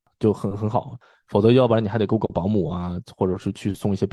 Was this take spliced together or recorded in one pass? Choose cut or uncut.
uncut